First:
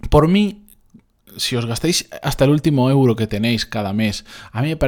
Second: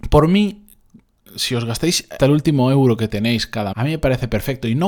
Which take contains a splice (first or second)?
second